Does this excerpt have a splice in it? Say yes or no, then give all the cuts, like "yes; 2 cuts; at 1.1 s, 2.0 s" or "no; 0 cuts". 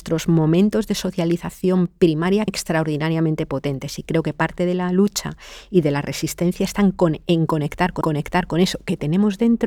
yes; 2 cuts; at 2.5 s, 8.0 s